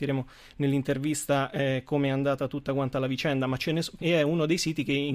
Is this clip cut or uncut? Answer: cut